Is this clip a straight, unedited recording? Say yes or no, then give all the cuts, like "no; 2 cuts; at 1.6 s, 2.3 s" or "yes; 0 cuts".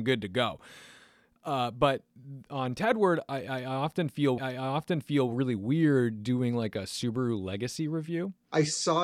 no; 1 cut; at 4.4 s